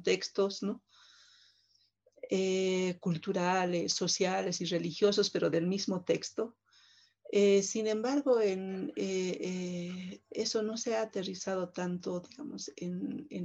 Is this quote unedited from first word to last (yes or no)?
yes